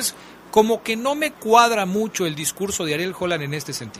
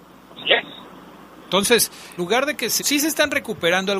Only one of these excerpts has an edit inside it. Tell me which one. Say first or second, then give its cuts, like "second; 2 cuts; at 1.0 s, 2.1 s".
second; 2 cuts; at 2.2 s, 2.8 s